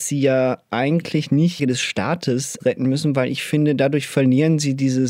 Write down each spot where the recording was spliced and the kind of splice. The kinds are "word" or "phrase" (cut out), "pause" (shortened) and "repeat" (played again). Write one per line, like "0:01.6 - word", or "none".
0:01.6 - phrase
0:02.6 - word

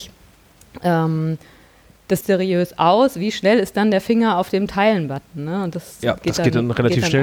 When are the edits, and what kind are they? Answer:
0:02.2 - word

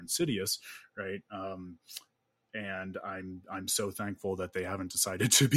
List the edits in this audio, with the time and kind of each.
none

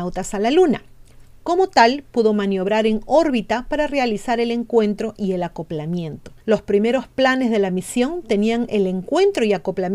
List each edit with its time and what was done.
0:06.4 - pause

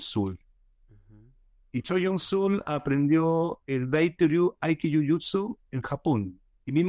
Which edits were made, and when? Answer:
none

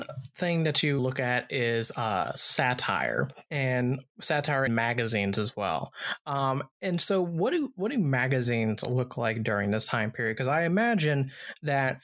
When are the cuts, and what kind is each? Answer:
0:01.0 - word
0:03.5 - pause
0:04.7 - word
0:06.7 - pause

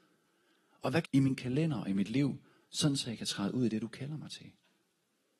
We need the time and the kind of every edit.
0:01.0 - phrase

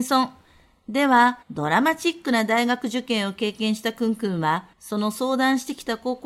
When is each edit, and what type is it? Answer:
0:01.4 - pause
0:04.7 - pause

